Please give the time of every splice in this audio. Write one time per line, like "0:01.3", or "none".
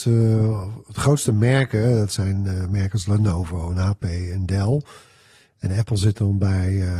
none